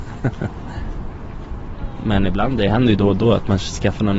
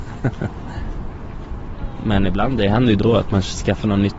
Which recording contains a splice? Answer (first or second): second